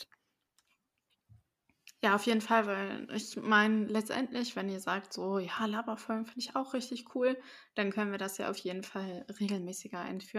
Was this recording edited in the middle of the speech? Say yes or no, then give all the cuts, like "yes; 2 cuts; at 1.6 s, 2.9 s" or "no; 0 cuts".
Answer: no; 0 cuts